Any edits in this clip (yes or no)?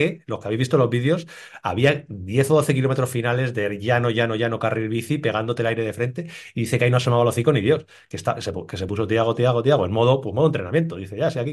no